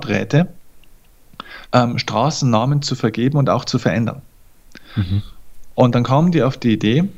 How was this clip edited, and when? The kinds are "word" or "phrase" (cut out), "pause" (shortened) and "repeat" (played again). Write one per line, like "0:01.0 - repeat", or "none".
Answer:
0:01.7 - pause

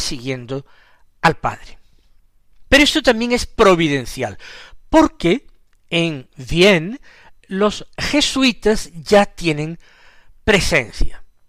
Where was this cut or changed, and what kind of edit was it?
0:02.7 - pause

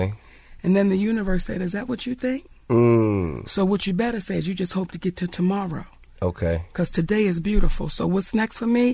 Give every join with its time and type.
none

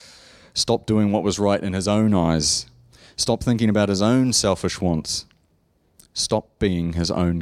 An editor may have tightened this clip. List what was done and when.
none

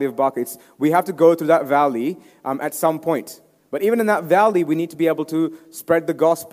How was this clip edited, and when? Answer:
none

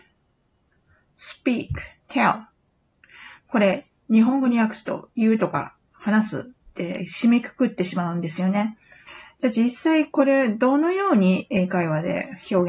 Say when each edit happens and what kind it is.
0:02.0 - pause
0:06.6 - pause

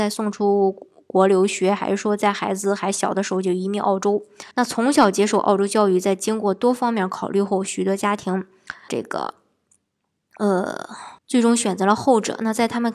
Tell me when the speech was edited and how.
0:04.5 - pause
0:08.9 - word
0:11.2 - pause

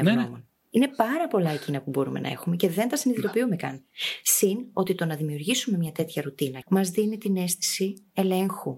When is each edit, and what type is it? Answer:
0:06.6 - word

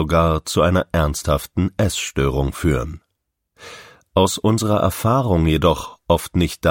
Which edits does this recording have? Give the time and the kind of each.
none

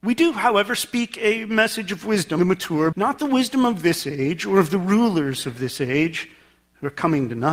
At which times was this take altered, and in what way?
0:02.4 - word
0:02.9 - word

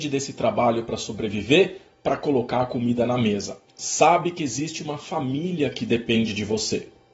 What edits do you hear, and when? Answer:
0:03.7 - pause

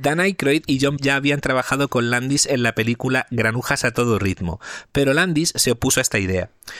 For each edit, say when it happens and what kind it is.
0:01.0 - word

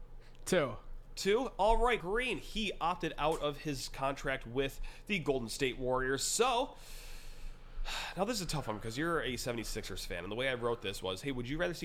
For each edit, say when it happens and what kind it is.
0:02.0 - word

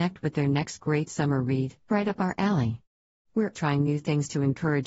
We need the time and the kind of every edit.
0:01.9 - word
0:03.5 - word

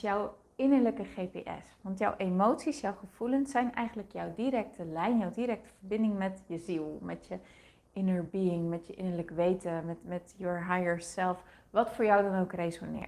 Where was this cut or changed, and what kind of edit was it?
none

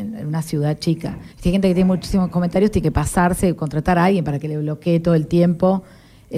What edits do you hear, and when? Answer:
0:01.3 - pause

